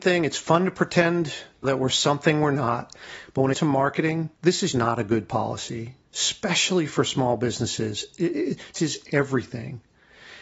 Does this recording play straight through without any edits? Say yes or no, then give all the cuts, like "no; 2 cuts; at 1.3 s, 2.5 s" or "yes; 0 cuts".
no; 6 cuts; at 1.6 s, 3.5 s, 4.4 s, 4.7 s, 6.0 s, 8.7 s